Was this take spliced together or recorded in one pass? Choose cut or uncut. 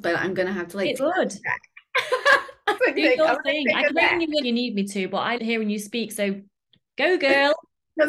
cut